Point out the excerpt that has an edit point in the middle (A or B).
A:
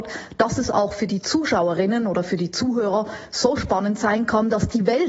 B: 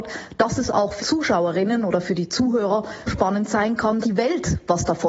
B